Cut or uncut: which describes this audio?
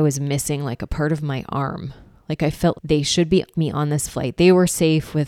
cut